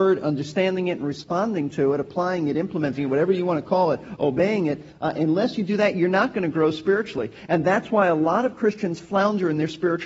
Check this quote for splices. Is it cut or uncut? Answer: uncut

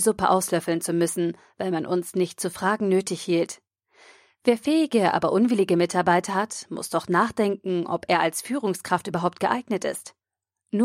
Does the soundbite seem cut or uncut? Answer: uncut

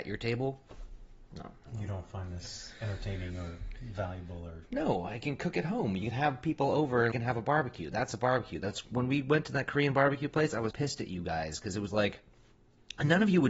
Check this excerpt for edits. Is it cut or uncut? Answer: cut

